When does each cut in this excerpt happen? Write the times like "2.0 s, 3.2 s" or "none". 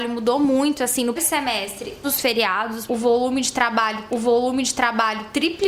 1.2 s, 2.0 s, 2.9 s, 4.1 s

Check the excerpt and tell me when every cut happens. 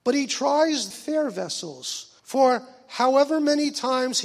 0.9 s, 2.2 s

